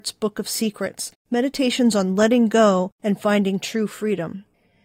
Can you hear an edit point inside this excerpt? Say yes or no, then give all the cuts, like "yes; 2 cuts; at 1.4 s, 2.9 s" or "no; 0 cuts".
yes; 2 cuts; at 1.2 s, 2.9 s